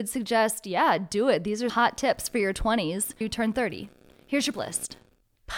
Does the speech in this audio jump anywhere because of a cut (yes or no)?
yes